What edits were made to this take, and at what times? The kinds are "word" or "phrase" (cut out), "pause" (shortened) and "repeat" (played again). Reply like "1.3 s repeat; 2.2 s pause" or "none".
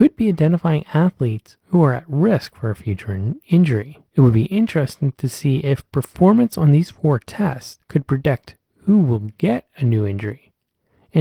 1.6 s pause; 4.1 s pause; 7.8 s pause